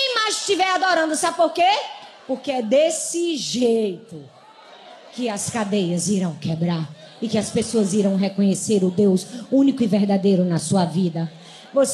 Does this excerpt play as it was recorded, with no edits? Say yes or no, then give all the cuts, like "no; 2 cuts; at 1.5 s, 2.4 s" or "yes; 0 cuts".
yes; 0 cuts